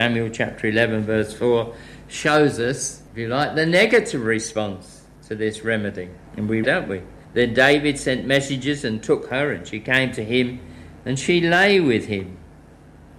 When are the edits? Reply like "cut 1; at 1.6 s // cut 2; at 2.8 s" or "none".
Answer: cut 1; at 3.1 s // cut 2; at 6.3 s // cut 3; at 6.6 s // cut 4; at 7.2 s